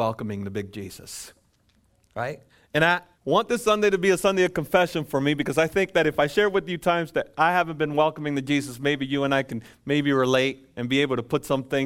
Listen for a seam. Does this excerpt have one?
yes; 2 cuts; at 2.5 s, 3.1 s

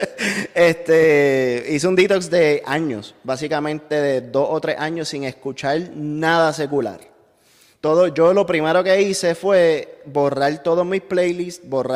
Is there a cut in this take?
no; 0 cuts

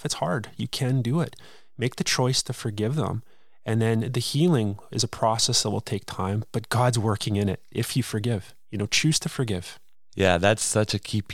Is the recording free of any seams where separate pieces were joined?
yes; 0 cuts

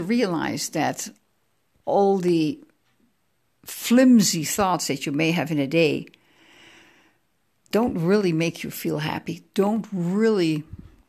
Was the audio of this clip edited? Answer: no; 0 cuts

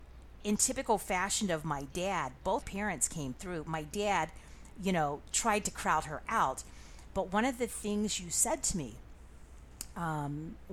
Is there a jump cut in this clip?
yes; 1 cut; at 2.6 s

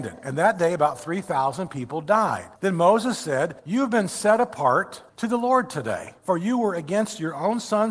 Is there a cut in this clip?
yes; 4 cuts; at 2.6 s, 3.6 s, 5.1 s, 6.2 s

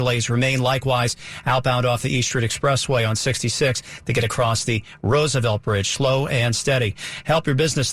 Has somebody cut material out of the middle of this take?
no; 0 cuts

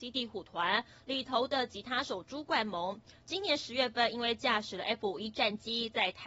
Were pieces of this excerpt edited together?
no; 0 cuts

